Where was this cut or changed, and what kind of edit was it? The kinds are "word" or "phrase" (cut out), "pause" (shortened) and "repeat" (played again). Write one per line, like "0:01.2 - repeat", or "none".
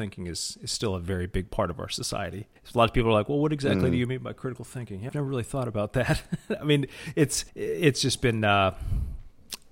0:02.6 - pause
0:05.1 - word
0:07.5 - pause